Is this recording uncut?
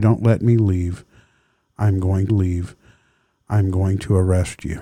no; 1 cut; at 2.3 s

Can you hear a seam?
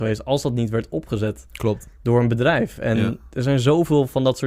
no; 0 cuts

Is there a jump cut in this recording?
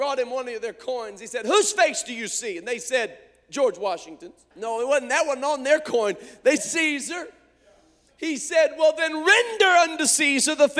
yes; 2 cuts; at 4.5 s, 6.6 s

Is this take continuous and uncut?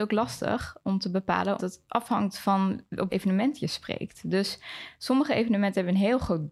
no; 2 cuts; at 1.6 s, 3.1 s

